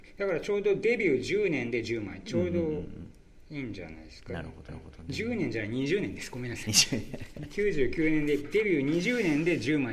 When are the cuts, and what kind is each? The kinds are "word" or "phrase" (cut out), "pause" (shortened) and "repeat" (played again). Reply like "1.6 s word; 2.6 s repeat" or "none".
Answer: 4.7 s repeat

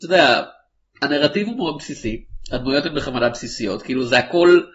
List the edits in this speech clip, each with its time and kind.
none

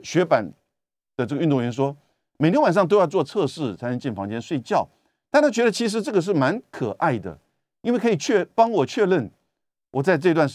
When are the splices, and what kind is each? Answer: none

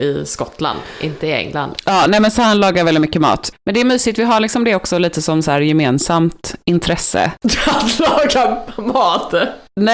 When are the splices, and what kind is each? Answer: none

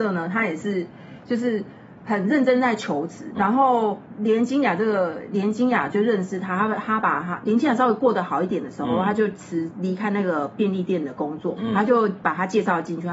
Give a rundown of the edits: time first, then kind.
3.4 s word; 11.6 s word

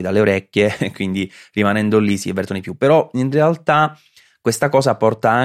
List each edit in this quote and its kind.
none

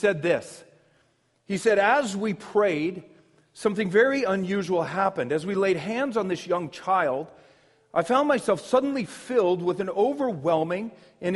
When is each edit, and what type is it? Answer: none

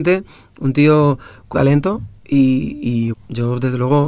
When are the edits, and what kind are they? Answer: 1.5 s word; 2.2 s pause; 3.1 s word

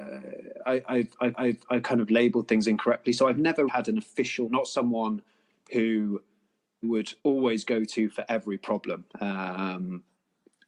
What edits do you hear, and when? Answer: 1.3 s repeat; 3.7 s word; 4.5 s word; 6.8 s word; 7.2 s pause; 9.1 s pause

